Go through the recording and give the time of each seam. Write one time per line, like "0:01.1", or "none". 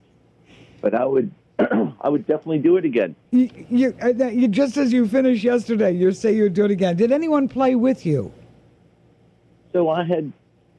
0:03.2